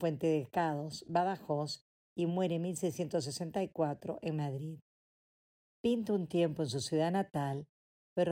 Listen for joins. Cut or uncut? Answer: uncut